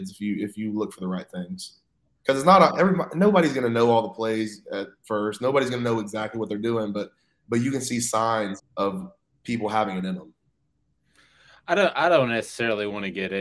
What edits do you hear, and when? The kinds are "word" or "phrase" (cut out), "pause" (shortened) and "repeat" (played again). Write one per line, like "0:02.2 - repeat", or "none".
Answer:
0:08.6 - word

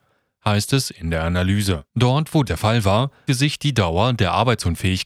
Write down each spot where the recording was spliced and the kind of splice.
0:01.9 - pause
0:02.5 - word
0:03.3 - word

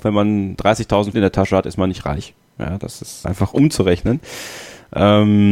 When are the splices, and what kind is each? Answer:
0:01.1 - word
0:03.2 - word

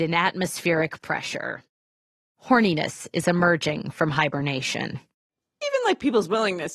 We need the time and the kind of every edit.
none

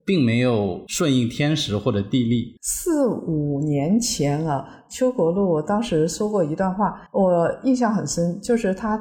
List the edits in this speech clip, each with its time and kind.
0:02.6 - pause
0:07.1 - pause

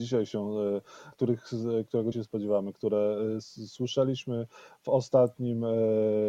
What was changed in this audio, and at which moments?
0:01.1 - word
0:02.1 - word

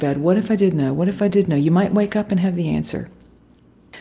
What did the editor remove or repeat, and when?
none

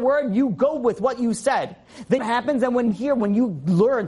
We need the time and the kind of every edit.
0:02.2 - phrase
0:02.9 - word

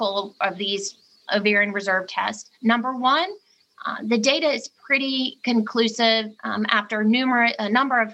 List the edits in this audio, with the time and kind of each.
0:01.3 - word
0:02.5 - pause
0:06.4 - pause

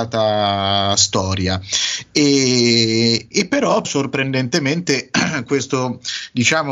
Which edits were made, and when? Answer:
0:03.3 - word
0:03.8 - phrase

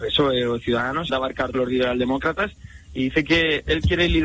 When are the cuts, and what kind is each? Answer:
0:01.1 - word
0:01.5 - word

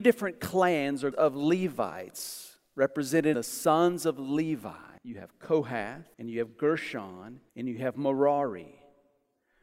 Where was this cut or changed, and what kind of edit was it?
0:01.1 - word
0:03.3 - word
0:05.0 - pause
0:06.1 - pause
0:07.5 - pause

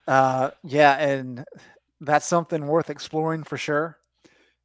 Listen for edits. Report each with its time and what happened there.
none

